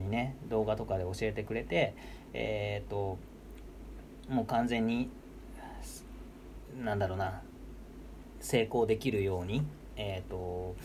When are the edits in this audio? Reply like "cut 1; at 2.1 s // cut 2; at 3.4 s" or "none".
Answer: none